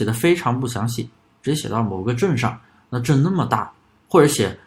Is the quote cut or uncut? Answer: uncut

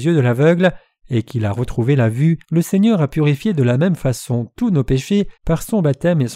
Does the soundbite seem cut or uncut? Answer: cut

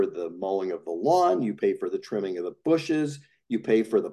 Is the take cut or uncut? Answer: uncut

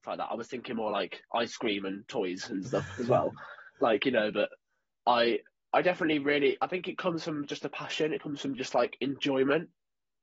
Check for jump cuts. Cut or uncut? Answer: uncut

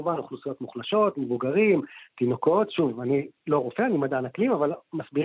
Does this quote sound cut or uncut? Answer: uncut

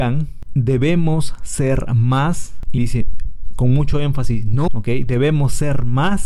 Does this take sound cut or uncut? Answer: cut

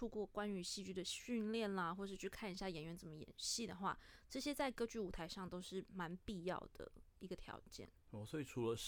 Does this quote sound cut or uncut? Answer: cut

